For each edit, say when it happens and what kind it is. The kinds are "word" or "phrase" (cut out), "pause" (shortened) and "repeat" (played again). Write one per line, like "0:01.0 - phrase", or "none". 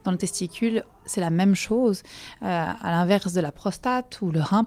none